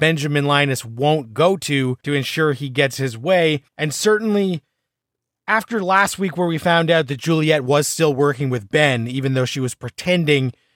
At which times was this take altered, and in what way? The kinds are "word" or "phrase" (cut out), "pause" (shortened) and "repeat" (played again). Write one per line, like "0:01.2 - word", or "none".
0:02.0 - pause
0:03.7 - pause